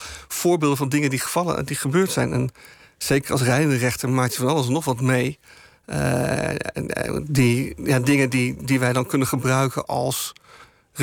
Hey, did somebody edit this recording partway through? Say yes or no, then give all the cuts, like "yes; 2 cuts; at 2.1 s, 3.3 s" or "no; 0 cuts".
no; 0 cuts